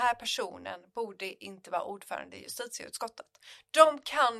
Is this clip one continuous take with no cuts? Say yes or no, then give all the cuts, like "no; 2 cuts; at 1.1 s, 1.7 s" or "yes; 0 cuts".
yes; 0 cuts